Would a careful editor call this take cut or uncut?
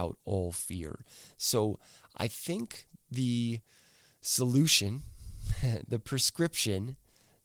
uncut